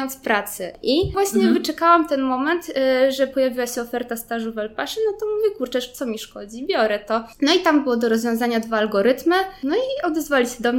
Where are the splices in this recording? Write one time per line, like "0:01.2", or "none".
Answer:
none